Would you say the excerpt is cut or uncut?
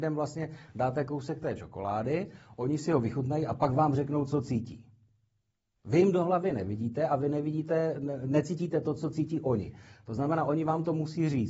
uncut